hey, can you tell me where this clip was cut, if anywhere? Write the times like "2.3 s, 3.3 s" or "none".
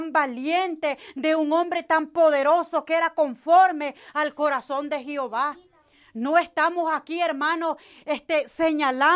none